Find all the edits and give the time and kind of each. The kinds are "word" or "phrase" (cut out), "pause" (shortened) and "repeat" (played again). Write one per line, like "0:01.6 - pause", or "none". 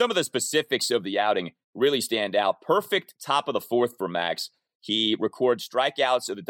none